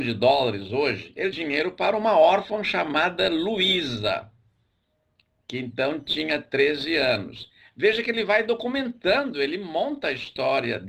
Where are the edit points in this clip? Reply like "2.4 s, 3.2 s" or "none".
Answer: 1.3 s